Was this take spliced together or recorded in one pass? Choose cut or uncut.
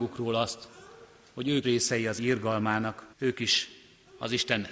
cut